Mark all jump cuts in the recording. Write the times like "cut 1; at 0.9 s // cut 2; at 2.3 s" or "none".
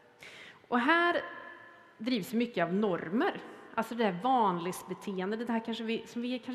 none

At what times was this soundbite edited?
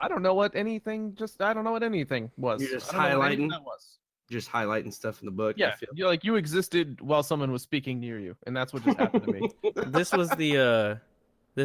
cut 1; at 9.7 s

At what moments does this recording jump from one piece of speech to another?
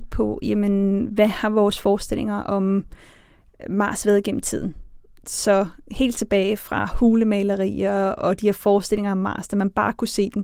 none

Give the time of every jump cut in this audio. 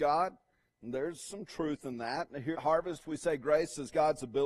cut 1; at 2.5 s

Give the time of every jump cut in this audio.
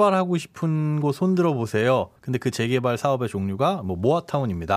cut 1; at 2.2 s

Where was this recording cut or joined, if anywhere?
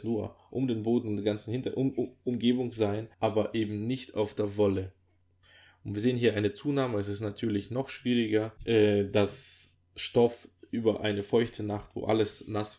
cut 1; at 3.1 s // cut 2; at 8.6 s

